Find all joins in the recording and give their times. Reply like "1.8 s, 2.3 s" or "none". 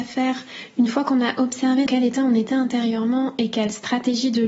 1.9 s